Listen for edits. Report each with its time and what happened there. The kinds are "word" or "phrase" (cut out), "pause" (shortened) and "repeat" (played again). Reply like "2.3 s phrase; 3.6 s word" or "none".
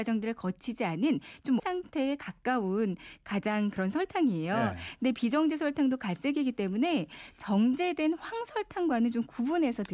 1.6 s word

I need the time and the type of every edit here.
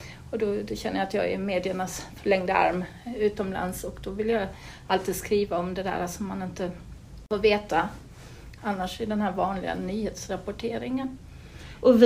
8.6 s word

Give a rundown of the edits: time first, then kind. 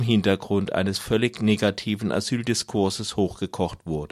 none

